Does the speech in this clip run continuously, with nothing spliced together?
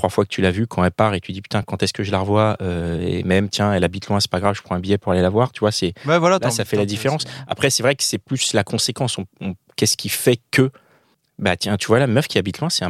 yes; 0 cuts

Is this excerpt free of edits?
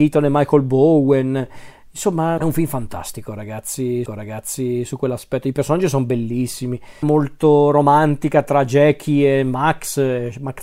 no; 3 cuts; at 2.4 s, 4.1 s, 7.0 s

